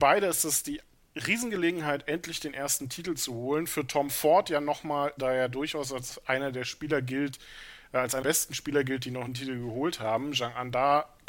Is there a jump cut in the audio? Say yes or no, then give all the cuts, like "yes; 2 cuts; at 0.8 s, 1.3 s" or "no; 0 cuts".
yes; 3 cuts; at 5.2 s, 8.2 s, 9.3 s